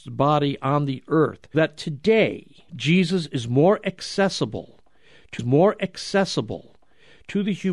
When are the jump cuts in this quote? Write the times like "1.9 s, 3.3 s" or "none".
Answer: 1.5 s, 2.7 s, 5.4 s